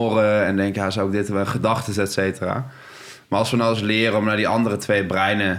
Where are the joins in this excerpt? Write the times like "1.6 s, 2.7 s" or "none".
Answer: none